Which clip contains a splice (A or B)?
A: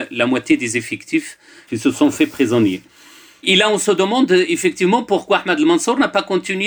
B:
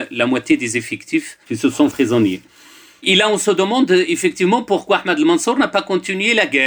B